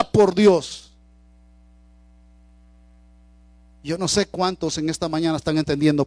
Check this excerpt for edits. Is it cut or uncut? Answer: uncut